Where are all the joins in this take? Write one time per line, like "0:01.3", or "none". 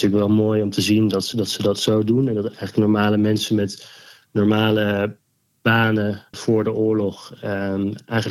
0:01.3
0:06.3